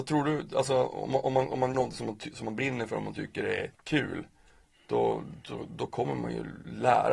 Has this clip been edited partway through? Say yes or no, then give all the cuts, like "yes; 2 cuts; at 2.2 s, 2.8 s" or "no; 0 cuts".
yes; 2 cuts; at 1.7 s, 3.7 s